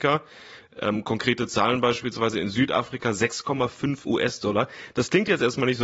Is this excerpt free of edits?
no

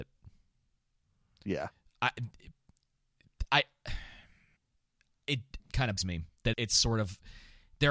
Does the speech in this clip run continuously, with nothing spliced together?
no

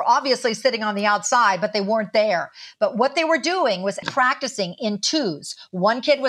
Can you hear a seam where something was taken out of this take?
yes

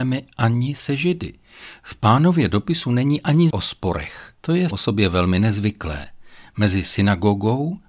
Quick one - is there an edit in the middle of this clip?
yes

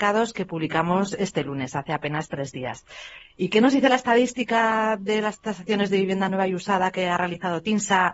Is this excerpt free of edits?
yes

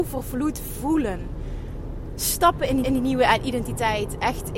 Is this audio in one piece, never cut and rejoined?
no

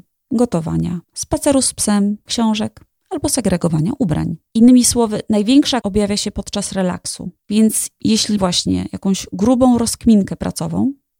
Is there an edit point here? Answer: yes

